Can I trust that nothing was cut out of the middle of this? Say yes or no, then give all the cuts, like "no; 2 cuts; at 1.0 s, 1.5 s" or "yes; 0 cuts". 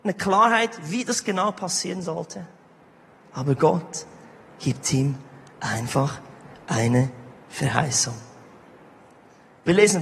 yes; 0 cuts